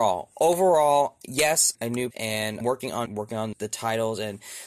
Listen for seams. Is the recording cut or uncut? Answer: cut